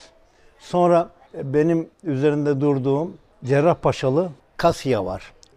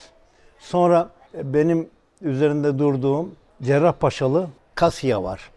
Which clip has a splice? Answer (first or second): first